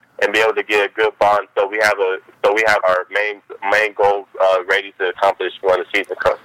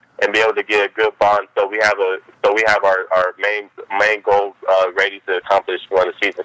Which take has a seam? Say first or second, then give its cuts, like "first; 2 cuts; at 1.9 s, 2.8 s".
first; 1 cut; at 2.8 s